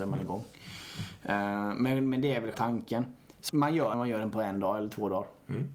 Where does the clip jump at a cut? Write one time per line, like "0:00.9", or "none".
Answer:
0:02.5
0:03.5
0:03.9